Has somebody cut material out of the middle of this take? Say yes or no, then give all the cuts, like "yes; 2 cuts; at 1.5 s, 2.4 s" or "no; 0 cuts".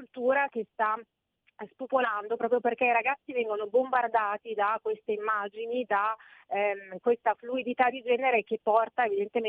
no; 0 cuts